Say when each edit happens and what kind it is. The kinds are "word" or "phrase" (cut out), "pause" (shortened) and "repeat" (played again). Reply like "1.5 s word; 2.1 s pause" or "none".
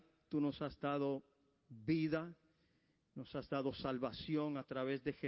none

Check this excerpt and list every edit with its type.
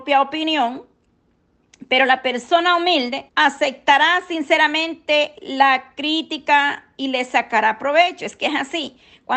3.3 s pause

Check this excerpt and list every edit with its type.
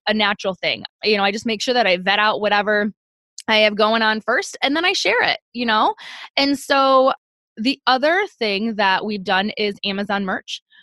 none

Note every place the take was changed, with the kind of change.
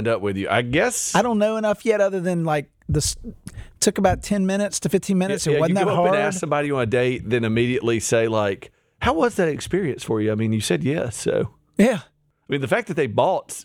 none

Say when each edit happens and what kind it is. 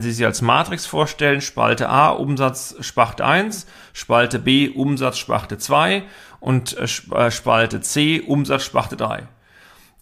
none

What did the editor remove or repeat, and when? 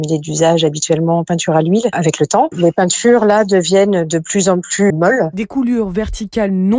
4.9 s word

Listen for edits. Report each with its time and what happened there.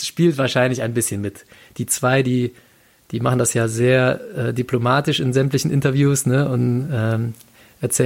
none

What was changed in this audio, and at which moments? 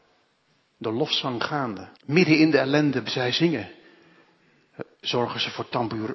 1.9 s pause; 3.1 s word; 4.9 s pause

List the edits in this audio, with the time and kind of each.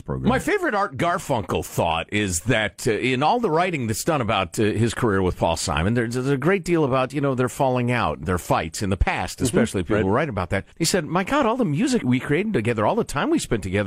8.2 s word; 10.7 s pause; 12.0 s word

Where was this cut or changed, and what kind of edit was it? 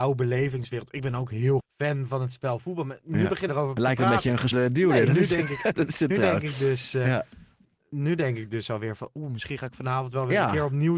1.6 s word; 3.5 s word; 4.5 s word; 5.1 s word; 6.1 s word

